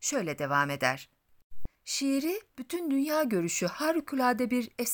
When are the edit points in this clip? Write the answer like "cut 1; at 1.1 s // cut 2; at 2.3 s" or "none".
cut 1; at 1.7 s

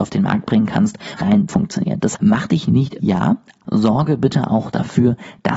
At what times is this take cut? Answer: cut 1; at 1.2 s // cut 2; at 1.5 s // cut 3; at 2.1 s // cut 4; at 3.0 s // cut 5; at 3.6 s

